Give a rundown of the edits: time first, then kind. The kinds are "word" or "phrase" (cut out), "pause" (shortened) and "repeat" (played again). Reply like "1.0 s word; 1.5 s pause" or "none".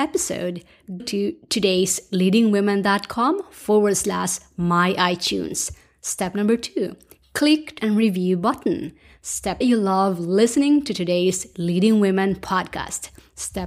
1.0 s word; 7.8 s word; 9.6 s phrase